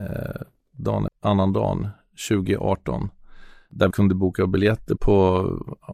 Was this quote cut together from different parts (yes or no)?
yes